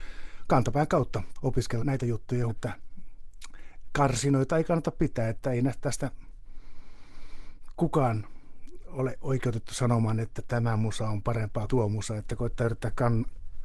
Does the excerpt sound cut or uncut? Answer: cut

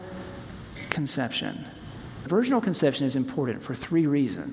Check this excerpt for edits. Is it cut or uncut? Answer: cut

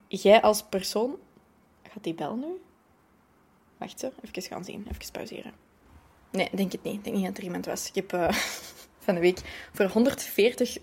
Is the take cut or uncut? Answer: uncut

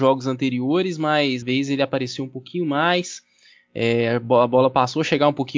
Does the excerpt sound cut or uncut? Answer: cut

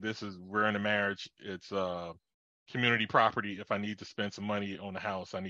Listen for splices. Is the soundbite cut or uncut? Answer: uncut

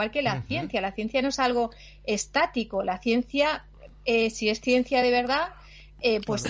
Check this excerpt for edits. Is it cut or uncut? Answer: uncut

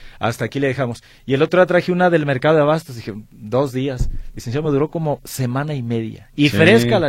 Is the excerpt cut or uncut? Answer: uncut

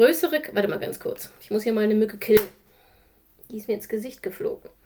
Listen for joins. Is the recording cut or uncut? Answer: uncut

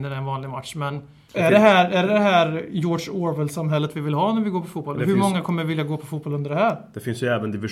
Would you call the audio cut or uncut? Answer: uncut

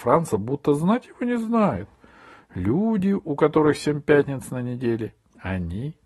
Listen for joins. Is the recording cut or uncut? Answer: uncut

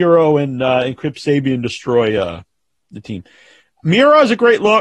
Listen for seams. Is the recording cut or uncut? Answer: uncut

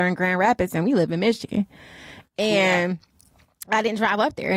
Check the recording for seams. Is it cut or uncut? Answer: uncut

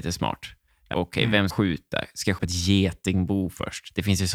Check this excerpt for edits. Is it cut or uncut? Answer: cut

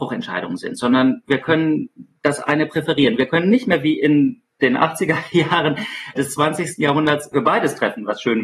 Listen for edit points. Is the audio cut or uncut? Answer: cut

